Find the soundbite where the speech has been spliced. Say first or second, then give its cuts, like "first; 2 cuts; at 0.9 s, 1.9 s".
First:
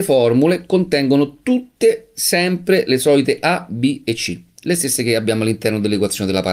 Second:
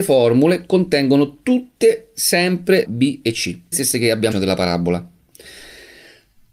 second; 3 cuts; at 2.8 s, 3.7 s, 4.3 s